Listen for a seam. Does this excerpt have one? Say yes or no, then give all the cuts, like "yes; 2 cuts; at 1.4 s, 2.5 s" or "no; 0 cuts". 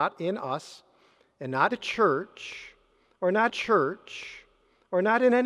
yes; 2 cuts; at 1.7 s, 3.5 s